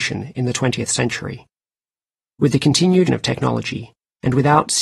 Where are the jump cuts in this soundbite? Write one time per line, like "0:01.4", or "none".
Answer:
0:03.1